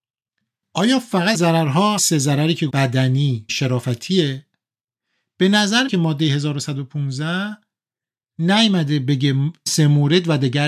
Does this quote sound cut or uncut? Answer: cut